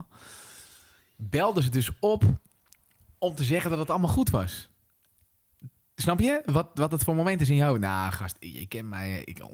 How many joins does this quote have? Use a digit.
0